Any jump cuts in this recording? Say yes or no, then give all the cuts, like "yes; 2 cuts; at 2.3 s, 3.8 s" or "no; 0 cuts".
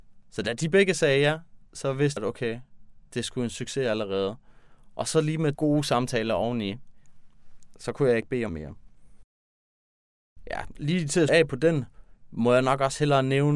yes; 4 cuts; at 2.2 s, 5.5 s, 8.5 s, 11.3 s